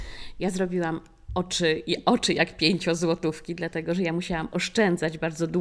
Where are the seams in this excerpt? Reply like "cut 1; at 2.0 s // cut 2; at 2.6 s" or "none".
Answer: none